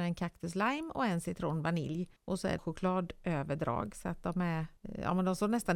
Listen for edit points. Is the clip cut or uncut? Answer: cut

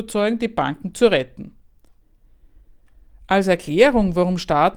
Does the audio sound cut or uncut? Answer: uncut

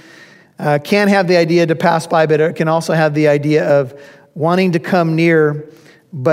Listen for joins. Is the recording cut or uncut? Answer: uncut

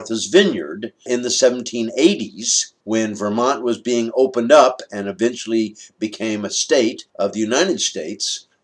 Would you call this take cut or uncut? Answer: cut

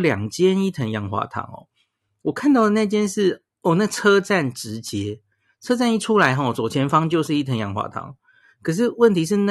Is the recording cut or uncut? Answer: uncut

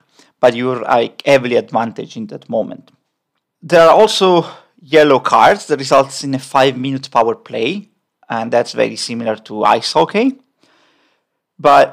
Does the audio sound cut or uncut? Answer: uncut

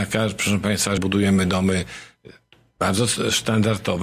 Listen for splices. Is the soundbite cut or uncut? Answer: cut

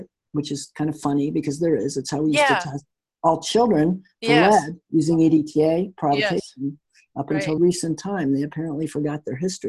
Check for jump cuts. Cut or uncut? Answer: cut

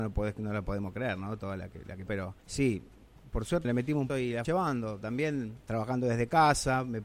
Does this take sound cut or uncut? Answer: cut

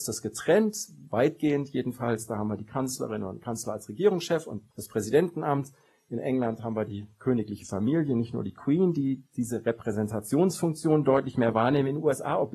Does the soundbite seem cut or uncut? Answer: cut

